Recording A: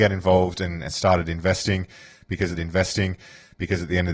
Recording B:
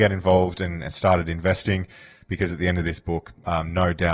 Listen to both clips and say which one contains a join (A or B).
A